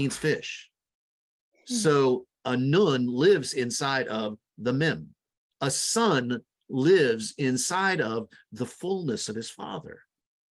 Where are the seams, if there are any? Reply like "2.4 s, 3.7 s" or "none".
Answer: none